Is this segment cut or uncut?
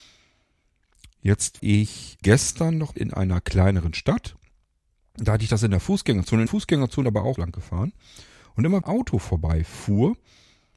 cut